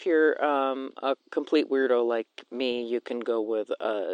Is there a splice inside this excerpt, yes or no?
yes